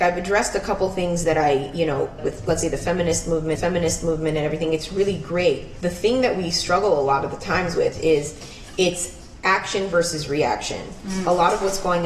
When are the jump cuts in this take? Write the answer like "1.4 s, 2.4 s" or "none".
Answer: 2.2 s, 3.6 s, 5.8 s